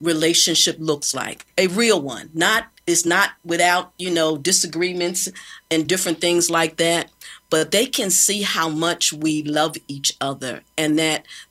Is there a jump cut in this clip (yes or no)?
no